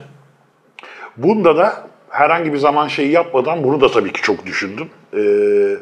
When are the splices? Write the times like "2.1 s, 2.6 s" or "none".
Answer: none